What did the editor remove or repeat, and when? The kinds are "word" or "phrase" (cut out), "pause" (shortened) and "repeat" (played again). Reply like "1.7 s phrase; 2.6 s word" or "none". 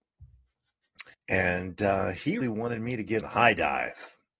1.1 s pause; 2.4 s word; 3.2 s word